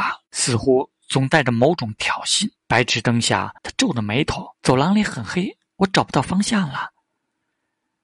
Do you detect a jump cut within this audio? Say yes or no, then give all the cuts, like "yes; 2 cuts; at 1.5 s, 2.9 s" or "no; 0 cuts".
yes; 3 cuts; at 2.6 s, 3.6 s, 4.5 s